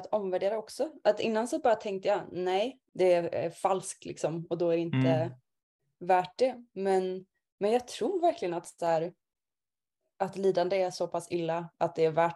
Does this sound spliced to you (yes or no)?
no